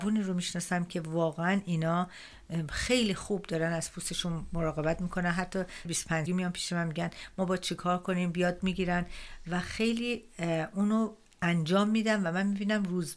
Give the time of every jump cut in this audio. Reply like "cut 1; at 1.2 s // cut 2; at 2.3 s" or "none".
cut 1; at 5.8 s // cut 2; at 6.3 s